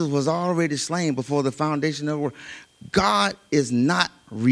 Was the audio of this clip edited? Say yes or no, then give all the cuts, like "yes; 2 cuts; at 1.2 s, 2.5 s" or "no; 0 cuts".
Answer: no; 0 cuts